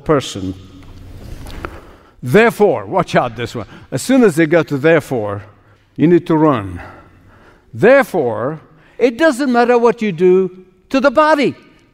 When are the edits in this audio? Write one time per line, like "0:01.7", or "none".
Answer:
none